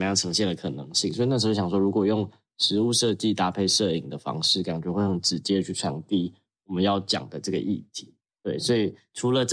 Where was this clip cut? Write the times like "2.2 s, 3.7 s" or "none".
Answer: 8.2 s